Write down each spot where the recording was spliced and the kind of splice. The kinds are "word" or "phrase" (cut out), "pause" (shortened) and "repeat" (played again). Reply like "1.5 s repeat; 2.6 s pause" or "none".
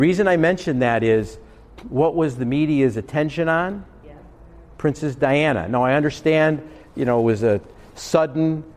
none